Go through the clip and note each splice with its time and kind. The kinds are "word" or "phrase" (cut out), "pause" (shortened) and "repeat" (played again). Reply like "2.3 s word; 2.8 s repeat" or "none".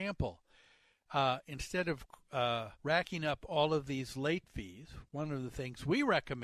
2.7 s pause

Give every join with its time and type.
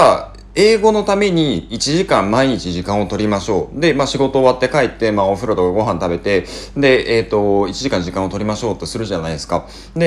none

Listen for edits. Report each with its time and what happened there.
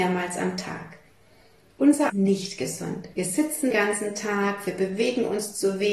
2.1 s phrase; 3.1 s pause; 3.7 s word

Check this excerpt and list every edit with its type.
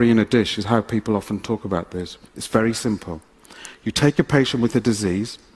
2.3 s pause

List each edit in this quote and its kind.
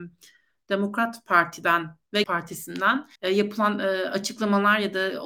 2.2 s word; 3.2 s pause

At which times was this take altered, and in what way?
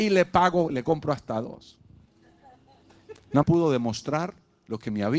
3.4 s word

